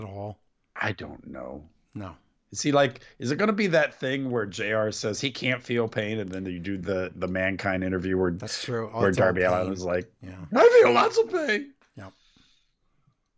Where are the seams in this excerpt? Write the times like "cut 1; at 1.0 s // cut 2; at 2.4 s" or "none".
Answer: none